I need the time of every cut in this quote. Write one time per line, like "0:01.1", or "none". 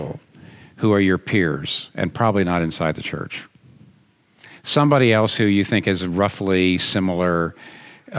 none